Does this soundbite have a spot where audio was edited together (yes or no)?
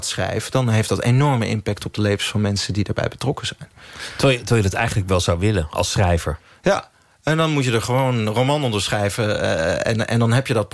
no